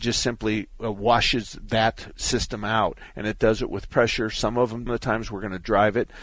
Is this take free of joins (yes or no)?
no